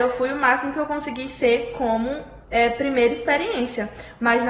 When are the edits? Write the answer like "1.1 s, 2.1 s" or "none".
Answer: 2.4 s

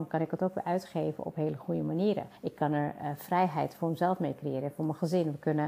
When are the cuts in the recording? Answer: 2.4 s

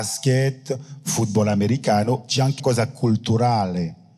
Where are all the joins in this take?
2.6 s

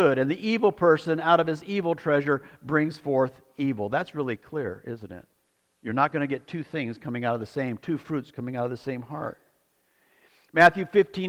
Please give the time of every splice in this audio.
none

